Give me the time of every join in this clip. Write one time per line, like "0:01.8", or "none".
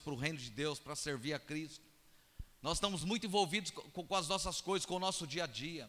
none